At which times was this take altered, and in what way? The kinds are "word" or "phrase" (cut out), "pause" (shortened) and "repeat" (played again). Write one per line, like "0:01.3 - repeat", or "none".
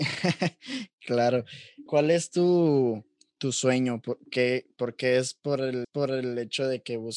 0:01.9 - word
0:05.8 - repeat